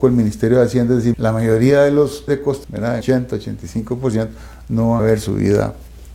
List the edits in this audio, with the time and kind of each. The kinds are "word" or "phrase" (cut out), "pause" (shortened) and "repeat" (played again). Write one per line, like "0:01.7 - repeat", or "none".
0:01.1 - word
0:02.3 - word
0:02.6 - word
0:03.0 - word
0:05.0 - word